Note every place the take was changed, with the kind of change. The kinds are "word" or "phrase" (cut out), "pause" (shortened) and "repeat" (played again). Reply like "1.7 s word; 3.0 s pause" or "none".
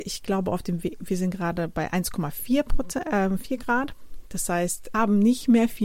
4.9 s phrase